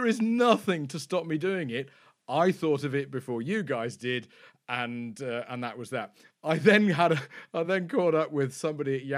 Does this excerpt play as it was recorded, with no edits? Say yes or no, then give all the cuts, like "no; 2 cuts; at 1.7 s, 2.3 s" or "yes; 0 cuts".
yes; 0 cuts